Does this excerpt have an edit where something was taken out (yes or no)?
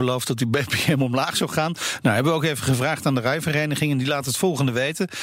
no